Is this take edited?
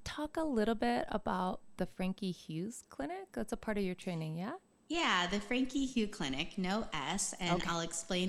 yes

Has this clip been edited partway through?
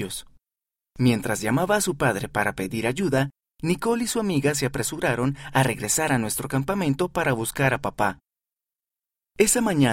no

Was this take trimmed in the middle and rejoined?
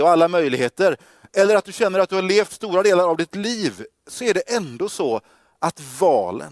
no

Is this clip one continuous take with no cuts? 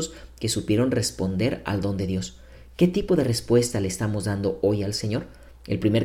yes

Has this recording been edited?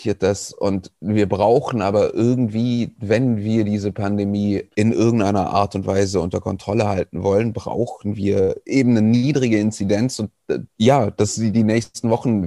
yes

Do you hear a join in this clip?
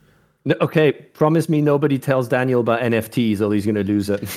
no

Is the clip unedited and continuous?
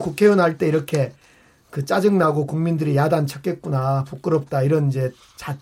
yes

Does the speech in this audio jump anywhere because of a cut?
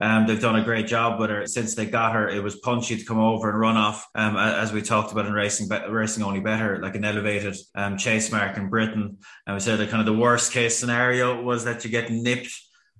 yes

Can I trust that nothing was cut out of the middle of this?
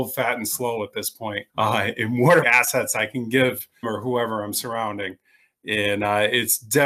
no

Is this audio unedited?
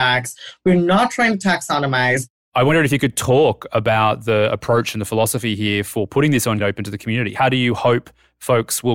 no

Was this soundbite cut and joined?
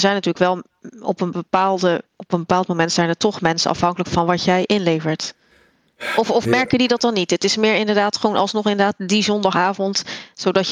yes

